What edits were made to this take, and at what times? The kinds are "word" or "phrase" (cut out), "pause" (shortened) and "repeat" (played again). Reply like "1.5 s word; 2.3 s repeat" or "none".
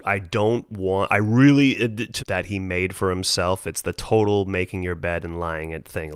2.2 s phrase